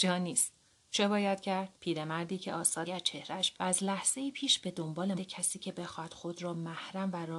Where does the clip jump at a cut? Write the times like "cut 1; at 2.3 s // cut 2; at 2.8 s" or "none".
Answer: cut 1; at 1.7 s // cut 2; at 2.9 s // cut 3; at 3.5 s // cut 4; at 5.2 s